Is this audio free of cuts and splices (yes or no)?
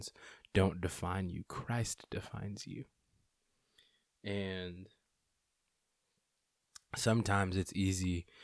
yes